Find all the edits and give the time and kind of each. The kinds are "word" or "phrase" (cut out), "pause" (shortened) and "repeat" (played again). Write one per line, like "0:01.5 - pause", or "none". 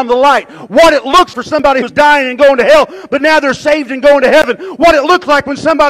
0:01.3 - word
0:01.8 - word